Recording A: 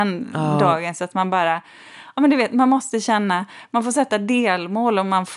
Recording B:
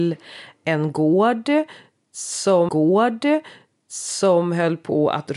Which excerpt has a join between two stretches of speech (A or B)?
B